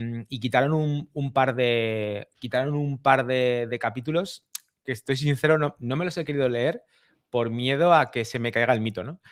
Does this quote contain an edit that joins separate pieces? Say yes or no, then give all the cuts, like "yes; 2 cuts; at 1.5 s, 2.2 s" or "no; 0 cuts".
no; 0 cuts